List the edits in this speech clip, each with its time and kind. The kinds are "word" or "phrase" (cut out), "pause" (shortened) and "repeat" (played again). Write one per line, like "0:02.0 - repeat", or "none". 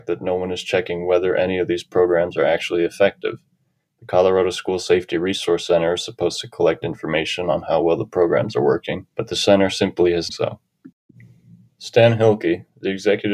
0:09.1 - pause
0:10.3 - phrase